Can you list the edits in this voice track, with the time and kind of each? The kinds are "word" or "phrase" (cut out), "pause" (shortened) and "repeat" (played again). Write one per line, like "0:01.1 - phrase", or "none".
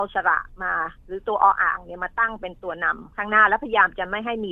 0:03.1 - pause